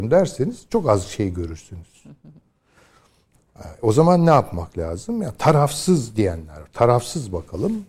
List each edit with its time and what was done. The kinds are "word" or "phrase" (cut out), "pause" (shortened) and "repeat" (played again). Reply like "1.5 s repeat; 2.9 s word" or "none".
none